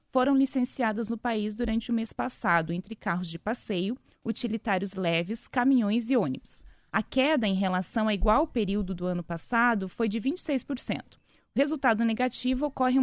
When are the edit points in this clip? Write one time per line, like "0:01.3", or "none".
none